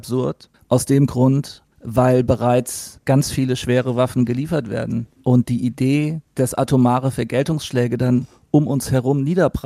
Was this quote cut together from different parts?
yes; 2 cuts; at 1.7 s, 6.3 s

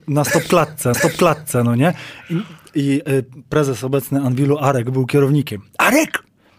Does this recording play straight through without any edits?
no; 1 cut; at 0.9 s

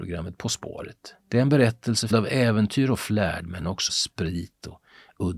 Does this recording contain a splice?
yes; 3 cuts; at 1.2 s, 2.1 s, 3.9 s

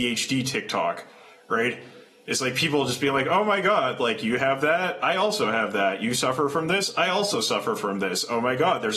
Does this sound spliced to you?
no; 0 cuts

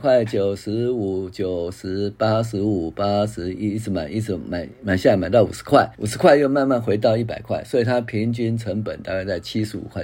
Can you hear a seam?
yes; 1 cut; at 5.9 s

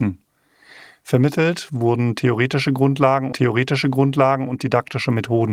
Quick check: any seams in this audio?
yes; 1 cut; at 3.3 s

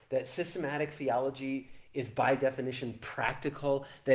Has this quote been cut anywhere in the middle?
no; 0 cuts

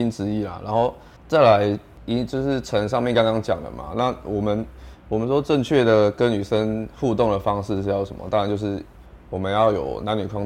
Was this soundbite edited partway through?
yes; 1 cut; at 1.2 s

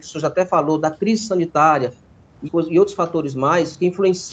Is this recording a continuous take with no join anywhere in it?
no; 1 cut; at 2.4 s

